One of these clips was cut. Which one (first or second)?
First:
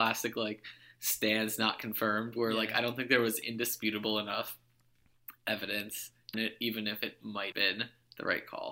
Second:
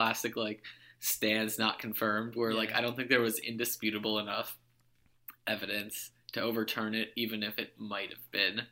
first